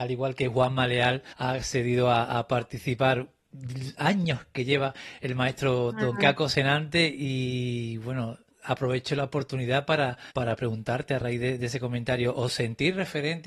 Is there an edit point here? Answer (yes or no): yes